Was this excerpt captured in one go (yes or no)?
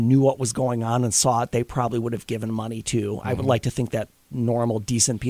yes